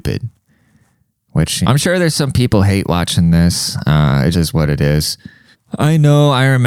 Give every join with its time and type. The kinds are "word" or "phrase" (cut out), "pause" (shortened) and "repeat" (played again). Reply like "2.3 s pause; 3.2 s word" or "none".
1.6 s word; 4.3 s word; 5.5 s pause